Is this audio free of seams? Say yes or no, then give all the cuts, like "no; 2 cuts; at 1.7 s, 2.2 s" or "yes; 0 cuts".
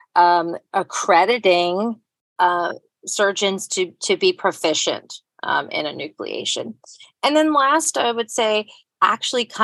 yes; 0 cuts